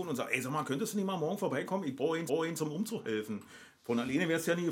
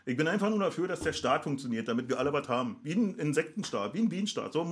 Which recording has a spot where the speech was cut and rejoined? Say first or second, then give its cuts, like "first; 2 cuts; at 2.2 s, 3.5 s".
first; 1 cut; at 2.3 s